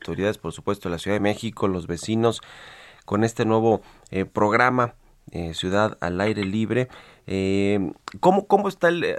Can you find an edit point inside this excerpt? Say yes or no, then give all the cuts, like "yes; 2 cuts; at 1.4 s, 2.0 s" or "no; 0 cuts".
no; 0 cuts